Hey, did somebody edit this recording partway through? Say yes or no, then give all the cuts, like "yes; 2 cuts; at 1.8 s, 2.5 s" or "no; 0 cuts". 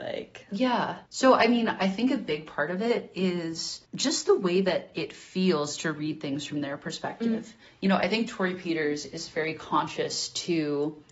yes; 2 cuts; at 1.1 s, 3.8 s